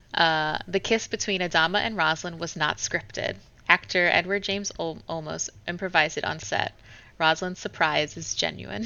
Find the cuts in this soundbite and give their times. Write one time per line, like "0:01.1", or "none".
none